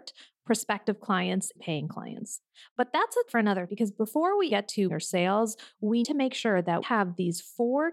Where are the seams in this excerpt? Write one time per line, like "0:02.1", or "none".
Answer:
0:01.6
0:03.3
0:03.7
0:04.5
0:04.9
0:06.0
0:06.8